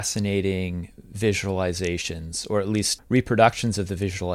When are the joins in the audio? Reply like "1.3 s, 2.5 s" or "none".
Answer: 3.0 s